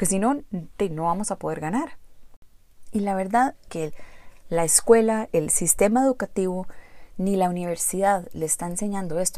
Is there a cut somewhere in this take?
yes; 2 cuts; at 3.7 s, 5.3 s

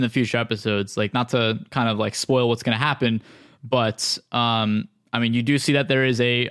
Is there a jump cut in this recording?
no; 0 cuts

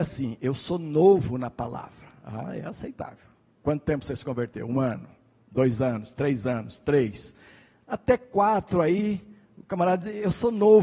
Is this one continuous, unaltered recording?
yes; 0 cuts

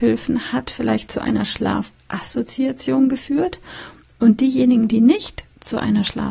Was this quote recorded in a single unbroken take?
yes; 0 cuts

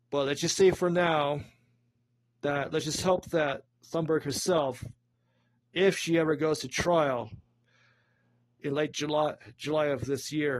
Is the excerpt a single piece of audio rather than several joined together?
yes; 0 cuts

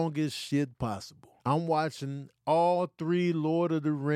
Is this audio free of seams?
no; 1 cut; at 1.4 s

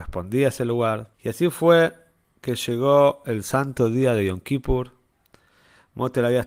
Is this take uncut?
no; 1 cut; at 1.1 s

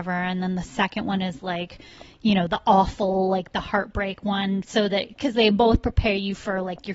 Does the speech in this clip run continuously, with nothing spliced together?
yes; 0 cuts

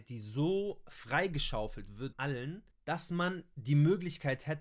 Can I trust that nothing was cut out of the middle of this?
no; 2 cuts; at 2.1 s, 2.7 s

